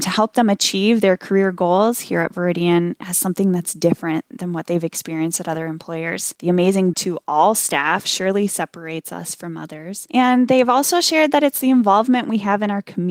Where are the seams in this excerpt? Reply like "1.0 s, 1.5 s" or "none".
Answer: 6.9 s